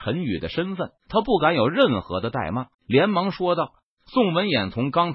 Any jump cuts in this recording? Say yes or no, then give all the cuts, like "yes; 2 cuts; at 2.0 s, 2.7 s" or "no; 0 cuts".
yes; 2 cuts; at 1.0 s, 2.7 s